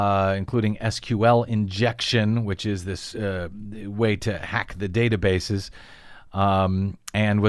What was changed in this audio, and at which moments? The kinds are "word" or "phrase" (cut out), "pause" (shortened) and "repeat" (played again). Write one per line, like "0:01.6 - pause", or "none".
none